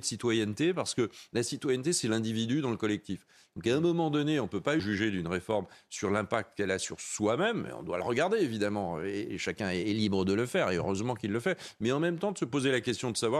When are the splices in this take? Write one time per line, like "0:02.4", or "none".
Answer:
0:04.8